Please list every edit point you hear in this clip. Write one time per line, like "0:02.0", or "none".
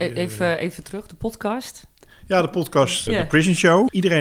0:03.1